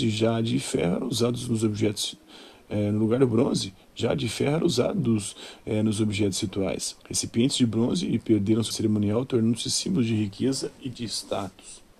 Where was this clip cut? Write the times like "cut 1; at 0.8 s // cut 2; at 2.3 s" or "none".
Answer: cut 1; at 7.0 s // cut 2; at 8.7 s